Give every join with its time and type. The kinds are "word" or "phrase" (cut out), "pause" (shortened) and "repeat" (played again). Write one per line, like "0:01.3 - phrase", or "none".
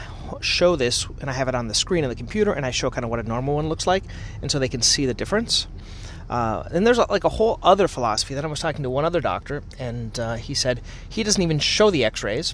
none